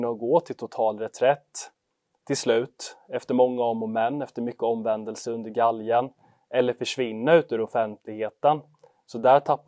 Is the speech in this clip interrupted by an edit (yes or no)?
no